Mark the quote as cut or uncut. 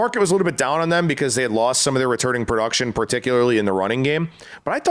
uncut